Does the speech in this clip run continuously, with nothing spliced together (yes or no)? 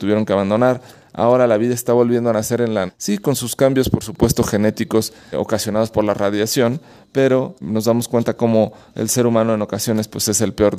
no